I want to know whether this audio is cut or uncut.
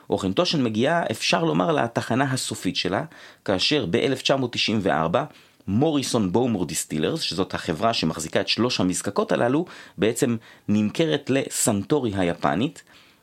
uncut